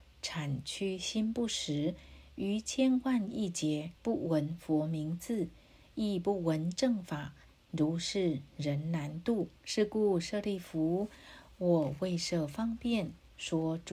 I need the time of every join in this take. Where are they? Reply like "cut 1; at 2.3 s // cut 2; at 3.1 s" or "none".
cut 1; at 4.0 s // cut 2; at 9.6 s